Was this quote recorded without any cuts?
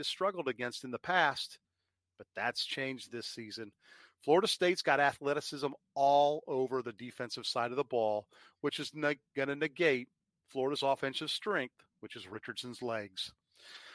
yes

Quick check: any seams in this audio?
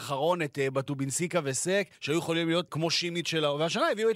yes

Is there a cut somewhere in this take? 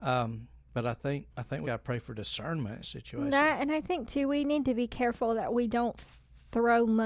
yes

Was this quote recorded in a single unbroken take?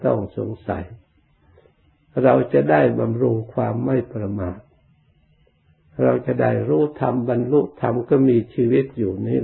yes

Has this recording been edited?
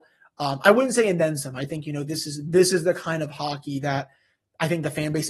no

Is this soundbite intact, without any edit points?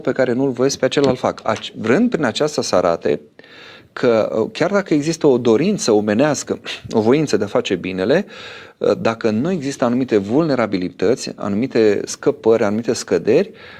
yes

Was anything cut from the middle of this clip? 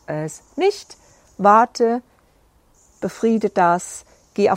no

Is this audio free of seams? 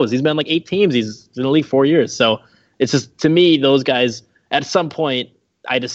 yes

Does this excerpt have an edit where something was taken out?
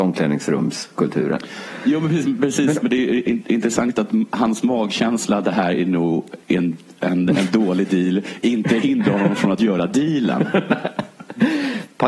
yes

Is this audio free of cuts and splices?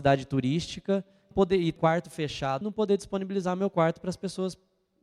no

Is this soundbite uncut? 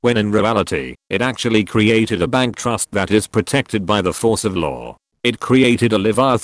yes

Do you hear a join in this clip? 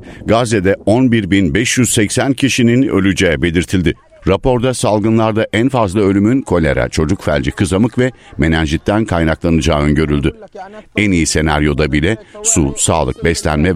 no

